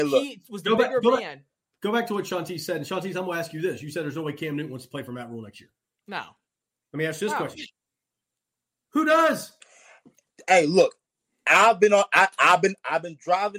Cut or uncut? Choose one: uncut